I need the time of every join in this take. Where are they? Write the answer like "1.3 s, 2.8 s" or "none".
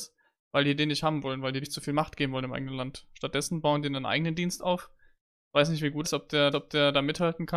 1.6 s, 6.0 s, 6.5 s